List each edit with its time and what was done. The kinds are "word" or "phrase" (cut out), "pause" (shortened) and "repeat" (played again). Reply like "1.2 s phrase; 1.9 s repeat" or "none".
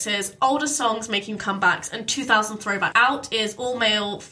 1.4 s word; 2.9 s word